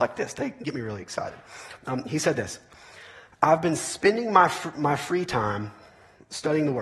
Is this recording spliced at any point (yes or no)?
no